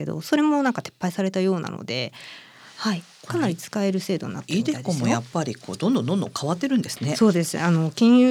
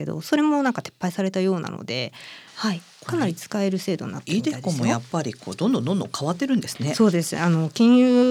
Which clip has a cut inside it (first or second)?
second